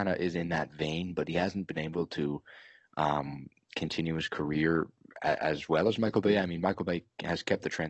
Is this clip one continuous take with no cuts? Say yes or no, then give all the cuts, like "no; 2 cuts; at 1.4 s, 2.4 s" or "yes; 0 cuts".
yes; 0 cuts